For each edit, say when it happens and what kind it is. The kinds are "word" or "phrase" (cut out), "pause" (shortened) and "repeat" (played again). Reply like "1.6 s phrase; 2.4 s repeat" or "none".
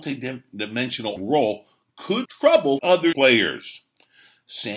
1.2 s word; 2.2 s word; 2.8 s word; 3.1 s word